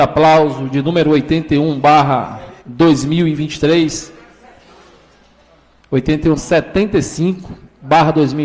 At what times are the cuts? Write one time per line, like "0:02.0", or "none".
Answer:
0:02.6
0:06.4